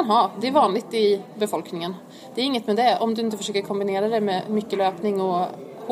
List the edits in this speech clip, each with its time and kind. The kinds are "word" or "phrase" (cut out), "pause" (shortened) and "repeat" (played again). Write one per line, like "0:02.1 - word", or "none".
none